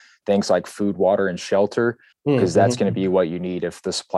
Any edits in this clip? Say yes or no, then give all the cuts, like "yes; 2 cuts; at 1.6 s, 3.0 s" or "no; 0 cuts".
yes; 1 cut; at 2.1 s